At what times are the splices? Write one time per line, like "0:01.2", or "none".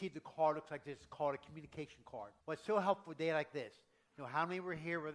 0:02.4